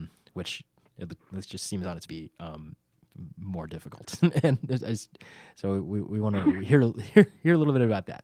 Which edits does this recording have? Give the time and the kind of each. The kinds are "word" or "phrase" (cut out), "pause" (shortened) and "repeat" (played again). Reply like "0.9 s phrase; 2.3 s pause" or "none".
2.1 s phrase